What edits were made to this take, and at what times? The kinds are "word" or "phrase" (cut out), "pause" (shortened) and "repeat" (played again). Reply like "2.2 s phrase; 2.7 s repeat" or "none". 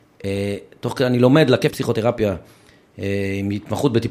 1.7 s word